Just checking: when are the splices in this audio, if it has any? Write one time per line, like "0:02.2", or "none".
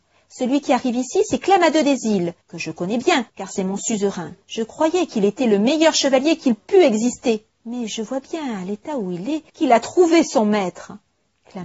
0:02.4
0:03.3
0:04.4
0:07.5
0:09.5